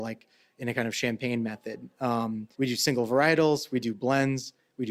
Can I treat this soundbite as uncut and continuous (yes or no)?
no